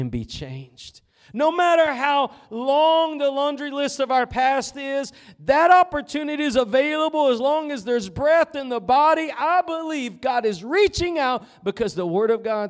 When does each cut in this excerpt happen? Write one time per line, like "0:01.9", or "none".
none